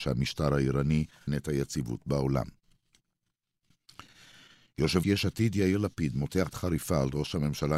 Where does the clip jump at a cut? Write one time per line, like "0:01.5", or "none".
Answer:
0:01.3
0:05.0
0:06.5